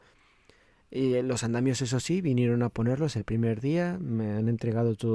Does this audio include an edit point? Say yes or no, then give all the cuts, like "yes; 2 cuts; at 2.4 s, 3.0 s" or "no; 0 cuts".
no; 0 cuts